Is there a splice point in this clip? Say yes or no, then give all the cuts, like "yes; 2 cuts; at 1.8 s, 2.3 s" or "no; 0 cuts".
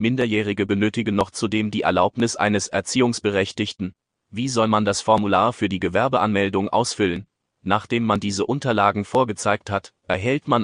no; 0 cuts